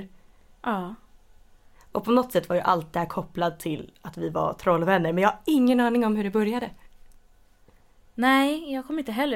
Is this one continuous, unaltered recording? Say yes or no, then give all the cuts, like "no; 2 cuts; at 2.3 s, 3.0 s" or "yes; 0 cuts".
yes; 0 cuts